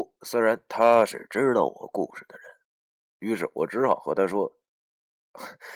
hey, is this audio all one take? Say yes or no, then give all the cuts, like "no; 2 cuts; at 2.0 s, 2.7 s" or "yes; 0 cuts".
yes; 0 cuts